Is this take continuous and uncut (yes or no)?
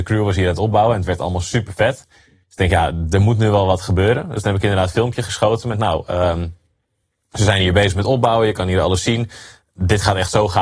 no